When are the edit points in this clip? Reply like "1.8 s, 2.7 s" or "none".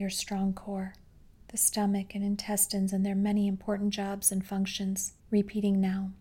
1.3 s, 5.2 s